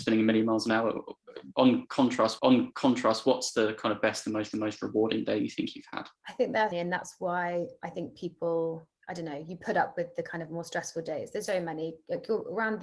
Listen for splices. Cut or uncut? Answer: cut